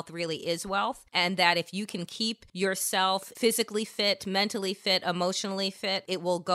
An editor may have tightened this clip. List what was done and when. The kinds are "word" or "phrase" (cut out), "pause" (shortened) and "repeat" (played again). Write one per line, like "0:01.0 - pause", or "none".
0:01.1 - pause
0:02.5 - pause